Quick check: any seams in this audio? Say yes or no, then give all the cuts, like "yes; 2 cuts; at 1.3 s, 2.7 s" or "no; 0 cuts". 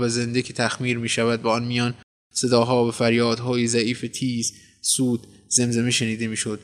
no; 0 cuts